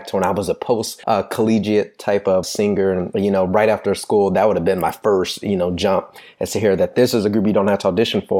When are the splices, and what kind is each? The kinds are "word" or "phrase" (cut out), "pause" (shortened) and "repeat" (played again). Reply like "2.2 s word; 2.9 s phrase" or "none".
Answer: 1.0 s pause; 2.4 s word

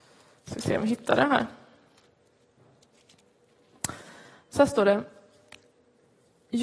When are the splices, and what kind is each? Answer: none

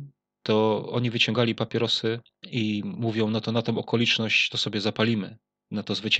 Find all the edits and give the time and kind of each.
none

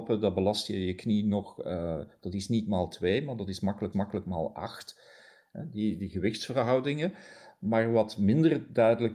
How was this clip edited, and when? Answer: 3.9 s repeat

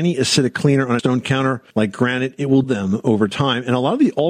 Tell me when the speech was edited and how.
1.0 s word; 1.7 s pause; 2.6 s word

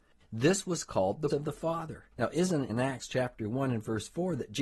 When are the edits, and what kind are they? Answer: 1.3 s word; 2.1 s pause; 2.7 s word

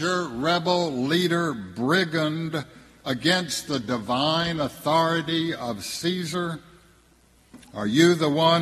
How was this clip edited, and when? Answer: none

